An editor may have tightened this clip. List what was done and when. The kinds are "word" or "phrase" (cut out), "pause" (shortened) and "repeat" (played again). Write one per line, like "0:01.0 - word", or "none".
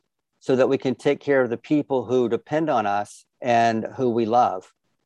0:03.3 - pause